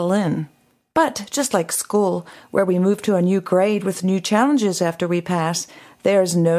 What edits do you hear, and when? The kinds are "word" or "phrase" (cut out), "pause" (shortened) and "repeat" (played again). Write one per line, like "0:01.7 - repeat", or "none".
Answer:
none

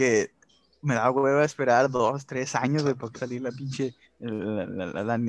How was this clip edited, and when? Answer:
0:03.2 - phrase
0:04.0 - pause

